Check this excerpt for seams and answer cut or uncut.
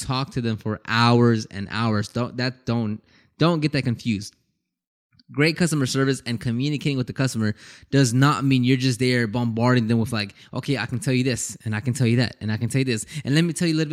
uncut